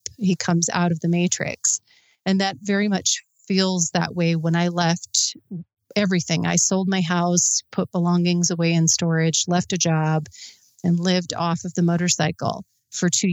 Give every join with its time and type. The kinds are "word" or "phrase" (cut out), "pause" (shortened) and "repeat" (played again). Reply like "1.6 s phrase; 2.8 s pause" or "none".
none